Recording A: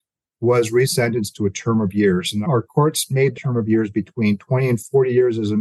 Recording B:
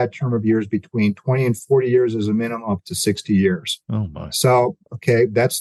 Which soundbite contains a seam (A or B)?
A